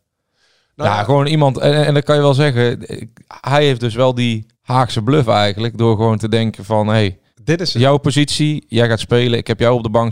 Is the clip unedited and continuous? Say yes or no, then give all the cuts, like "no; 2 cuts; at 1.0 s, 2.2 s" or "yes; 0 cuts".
no; 2 cuts; at 4.5 s, 7.3 s